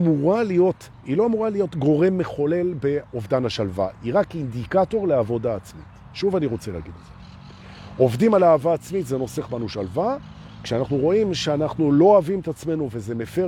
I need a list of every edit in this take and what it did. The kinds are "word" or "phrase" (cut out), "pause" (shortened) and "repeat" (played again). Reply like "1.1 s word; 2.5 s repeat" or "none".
0.9 s pause